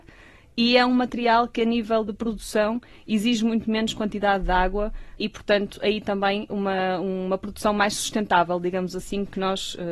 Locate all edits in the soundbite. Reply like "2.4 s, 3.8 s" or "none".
5.2 s, 6.5 s

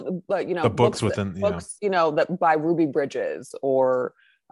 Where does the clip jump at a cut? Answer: none

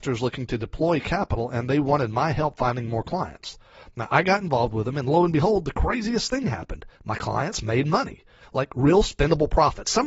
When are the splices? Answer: 7.0 s

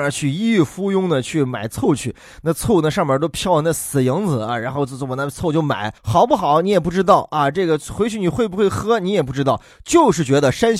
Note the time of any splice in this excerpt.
6.0 s

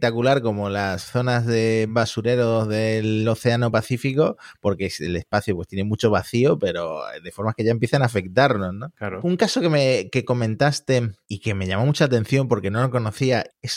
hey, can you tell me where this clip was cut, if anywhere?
none

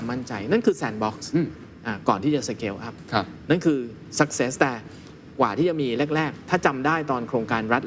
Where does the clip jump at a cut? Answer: none

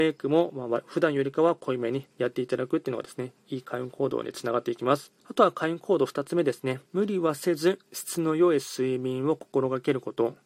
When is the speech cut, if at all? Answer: 5.2 s, 6.9 s, 7.8 s

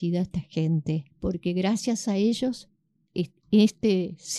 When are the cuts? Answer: 1.1 s

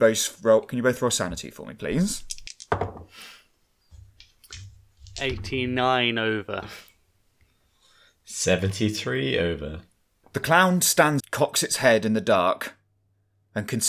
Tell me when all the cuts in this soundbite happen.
11.2 s

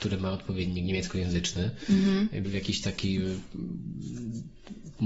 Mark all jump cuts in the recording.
2.4 s

